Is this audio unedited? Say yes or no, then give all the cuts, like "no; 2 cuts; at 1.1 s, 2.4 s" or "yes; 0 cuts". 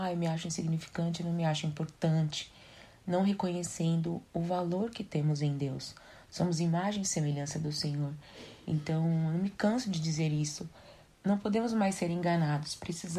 no; 1 cut; at 11.1 s